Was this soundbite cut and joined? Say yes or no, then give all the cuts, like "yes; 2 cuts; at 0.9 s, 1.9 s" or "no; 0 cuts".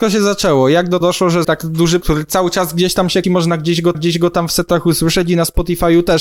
yes; 5 cuts; at 1.0 s, 1.4 s, 2.0 s, 3.2 s, 3.9 s